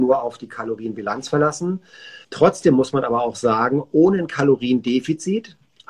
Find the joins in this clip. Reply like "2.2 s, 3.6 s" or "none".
2.2 s